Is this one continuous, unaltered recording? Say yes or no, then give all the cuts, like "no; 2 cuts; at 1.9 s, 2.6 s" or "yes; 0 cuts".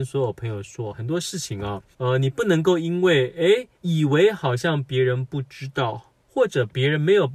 no; 3 cuts; at 1.9 s, 3.7 s, 6.2 s